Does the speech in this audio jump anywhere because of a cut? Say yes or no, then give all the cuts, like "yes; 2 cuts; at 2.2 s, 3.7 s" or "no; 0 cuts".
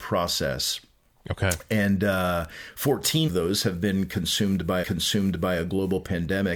yes; 2 cuts; at 3.3 s, 4.8 s